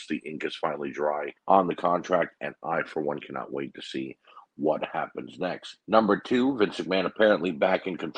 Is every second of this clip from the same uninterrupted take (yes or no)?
no